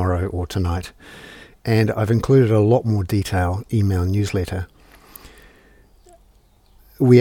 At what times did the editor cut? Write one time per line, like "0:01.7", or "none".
0:03.6